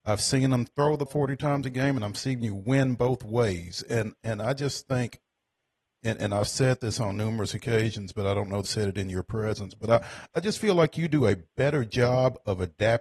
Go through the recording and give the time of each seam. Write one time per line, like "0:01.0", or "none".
0:01.1
0:08.6